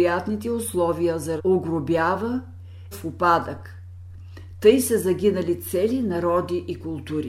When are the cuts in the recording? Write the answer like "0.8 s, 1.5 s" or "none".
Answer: 1.4 s, 2.9 s